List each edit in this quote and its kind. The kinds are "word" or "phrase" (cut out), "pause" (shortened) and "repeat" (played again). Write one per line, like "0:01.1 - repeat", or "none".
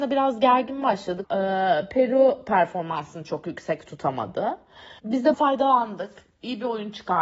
0:01.2 - word
0:05.0 - pause
0:05.3 - word